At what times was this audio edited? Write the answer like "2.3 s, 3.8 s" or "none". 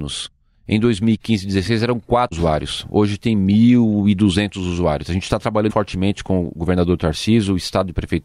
2.3 s, 5.7 s